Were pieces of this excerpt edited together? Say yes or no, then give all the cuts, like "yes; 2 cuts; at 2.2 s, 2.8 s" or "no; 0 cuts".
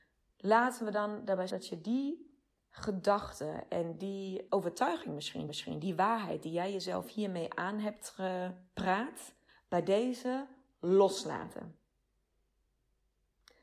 yes; 4 cuts; at 1.5 s, 4.5 s, 5.5 s, 9.5 s